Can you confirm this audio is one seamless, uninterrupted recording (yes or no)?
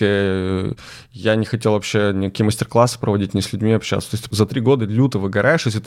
yes